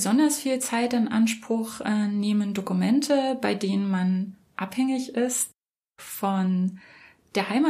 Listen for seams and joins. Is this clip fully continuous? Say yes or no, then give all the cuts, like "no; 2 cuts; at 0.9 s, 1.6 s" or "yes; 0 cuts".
yes; 0 cuts